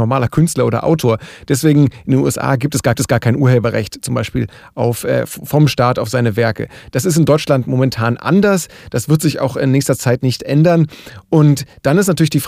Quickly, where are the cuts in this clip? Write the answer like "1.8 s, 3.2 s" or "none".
2.9 s

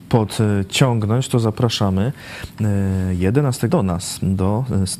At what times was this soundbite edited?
3.7 s

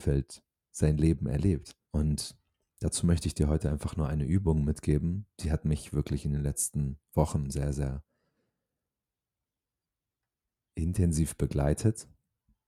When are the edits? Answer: 1.8 s, 5.3 s

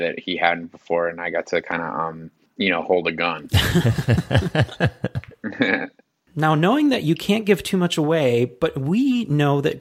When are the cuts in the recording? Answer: none

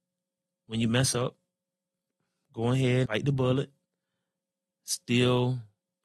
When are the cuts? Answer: 3.1 s

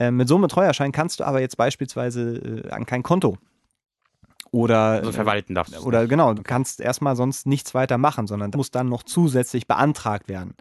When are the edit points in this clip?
5.0 s, 6.4 s, 8.5 s

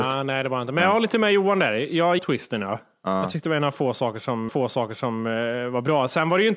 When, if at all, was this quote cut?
2.2 s, 4.5 s

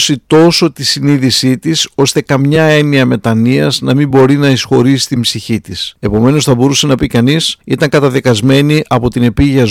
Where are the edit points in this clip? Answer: none

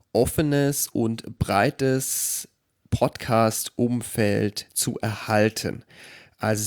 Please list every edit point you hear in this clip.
none

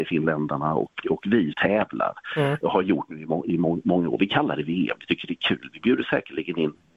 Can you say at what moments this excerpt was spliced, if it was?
1.0 s, 1.5 s

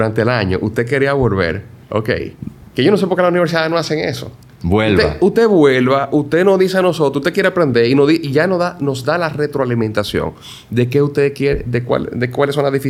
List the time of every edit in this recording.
1.8 s

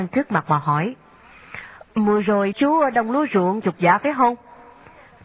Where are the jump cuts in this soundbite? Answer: 1.8 s, 2.5 s, 3.6 s

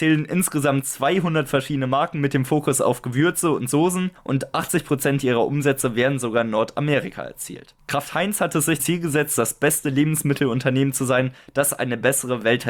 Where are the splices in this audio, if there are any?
8.8 s

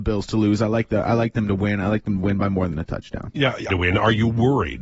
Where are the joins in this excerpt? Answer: 3.7 s

